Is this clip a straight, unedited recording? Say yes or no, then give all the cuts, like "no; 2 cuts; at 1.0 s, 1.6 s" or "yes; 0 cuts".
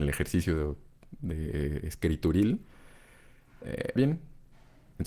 no; 1 cut; at 4.0 s